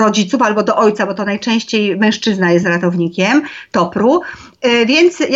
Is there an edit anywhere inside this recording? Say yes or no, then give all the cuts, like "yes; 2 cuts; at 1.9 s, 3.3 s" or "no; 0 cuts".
no; 0 cuts